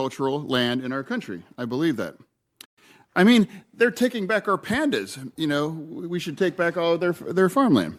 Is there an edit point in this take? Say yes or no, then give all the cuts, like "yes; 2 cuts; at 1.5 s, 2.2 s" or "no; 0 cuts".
no; 0 cuts